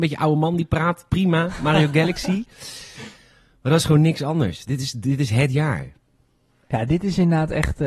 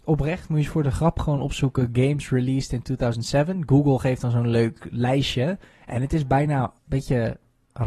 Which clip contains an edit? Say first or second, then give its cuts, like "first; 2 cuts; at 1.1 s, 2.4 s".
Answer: second; 2 cuts; at 5.7 s, 6.8 s